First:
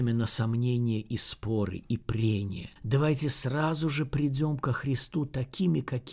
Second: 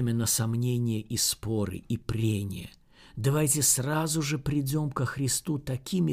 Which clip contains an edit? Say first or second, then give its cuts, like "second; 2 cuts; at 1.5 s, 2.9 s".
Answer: first; 1 cut; at 2.8 s